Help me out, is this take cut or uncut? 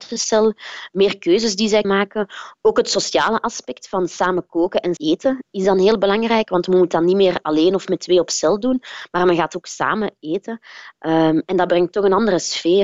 cut